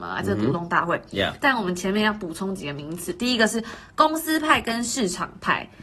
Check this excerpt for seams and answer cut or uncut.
uncut